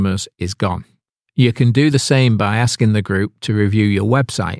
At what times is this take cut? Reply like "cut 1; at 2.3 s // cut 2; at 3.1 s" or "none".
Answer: none